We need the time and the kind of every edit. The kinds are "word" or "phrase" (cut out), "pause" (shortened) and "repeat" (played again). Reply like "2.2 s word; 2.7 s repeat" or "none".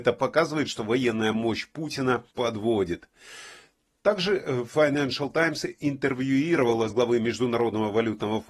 2.3 s pause; 6.9 s word